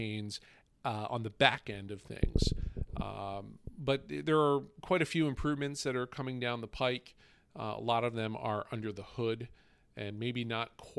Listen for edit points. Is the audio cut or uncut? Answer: uncut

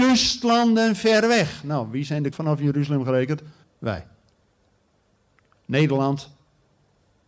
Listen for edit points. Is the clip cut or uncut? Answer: cut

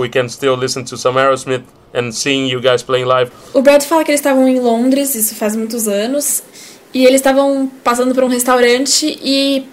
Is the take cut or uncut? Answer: uncut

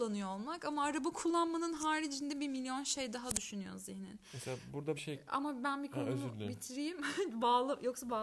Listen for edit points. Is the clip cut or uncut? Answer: cut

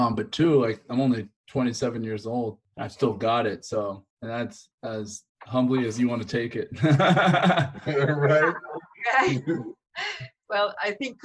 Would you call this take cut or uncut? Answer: uncut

